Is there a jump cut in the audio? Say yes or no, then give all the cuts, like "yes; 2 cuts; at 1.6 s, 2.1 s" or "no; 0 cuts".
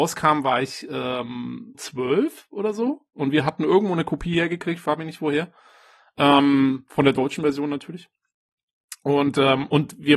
yes; 1 cut; at 1.7 s